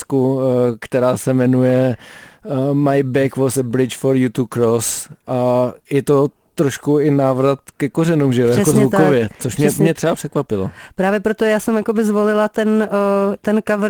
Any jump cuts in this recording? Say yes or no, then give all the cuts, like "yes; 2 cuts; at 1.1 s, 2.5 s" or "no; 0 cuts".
no; 0 cuts